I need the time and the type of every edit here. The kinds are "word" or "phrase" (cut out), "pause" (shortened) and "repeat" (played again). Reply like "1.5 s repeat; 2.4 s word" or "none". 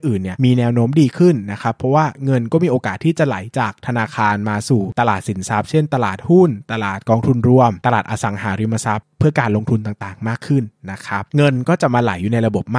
11.3 s pause

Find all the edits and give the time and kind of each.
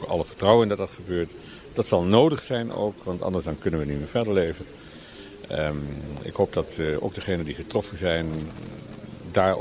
none

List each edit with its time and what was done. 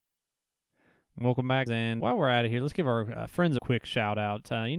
1.7 s word; 2.0 s word; 3.6 s phrase

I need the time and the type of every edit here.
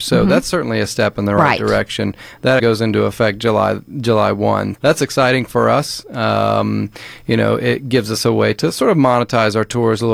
2.6 s word; 4.8 s word

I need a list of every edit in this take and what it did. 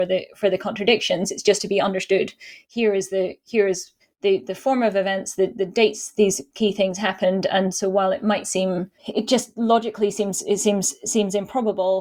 4.0 s pause; 9.0 s pause

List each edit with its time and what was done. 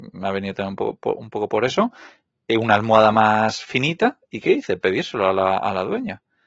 none

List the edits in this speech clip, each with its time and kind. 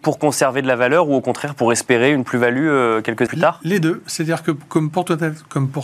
3.3 s word

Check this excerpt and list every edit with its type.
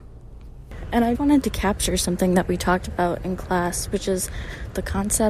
1.1 s word

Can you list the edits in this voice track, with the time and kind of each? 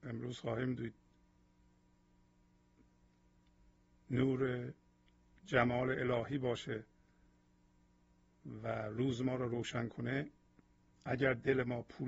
none

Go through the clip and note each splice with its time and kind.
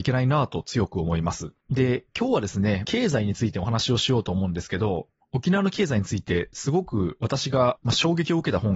1.6 s pause; 2.8 s phrase

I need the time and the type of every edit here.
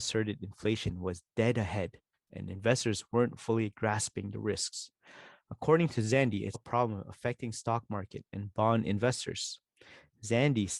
6.5 s word

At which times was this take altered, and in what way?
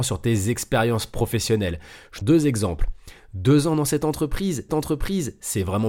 2.2 s word; 4.7 s repeat

